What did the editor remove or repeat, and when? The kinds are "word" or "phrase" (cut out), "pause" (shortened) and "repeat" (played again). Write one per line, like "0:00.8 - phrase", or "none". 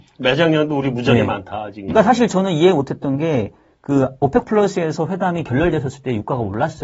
none